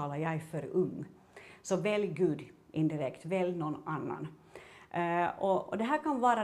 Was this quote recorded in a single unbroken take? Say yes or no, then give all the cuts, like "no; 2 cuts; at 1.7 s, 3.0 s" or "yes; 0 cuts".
yes; 0 cuts